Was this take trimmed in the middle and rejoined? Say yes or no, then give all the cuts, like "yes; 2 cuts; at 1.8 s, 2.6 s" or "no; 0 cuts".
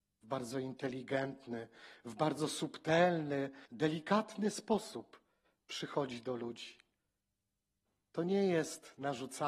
yes; 1 cut; at 3.7 s